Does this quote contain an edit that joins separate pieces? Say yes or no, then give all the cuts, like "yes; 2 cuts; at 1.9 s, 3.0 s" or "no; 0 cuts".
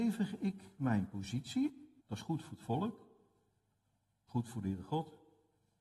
yes; 2 cuts; at 2.0 s, 4.3 s